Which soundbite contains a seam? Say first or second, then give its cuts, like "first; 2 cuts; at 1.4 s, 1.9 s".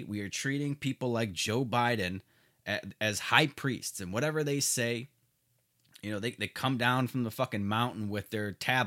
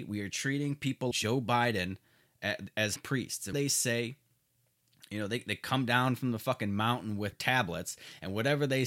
second; 4 cuts; at 1.1 s, 3.0 s, 3.5 s, 7.3 s